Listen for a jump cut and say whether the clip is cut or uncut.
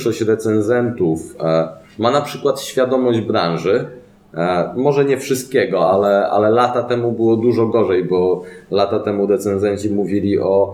uncut